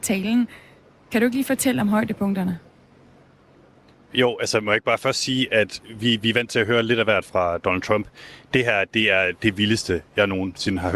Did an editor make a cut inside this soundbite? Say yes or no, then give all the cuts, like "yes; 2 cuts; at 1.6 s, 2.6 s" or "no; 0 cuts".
no; 0 cuts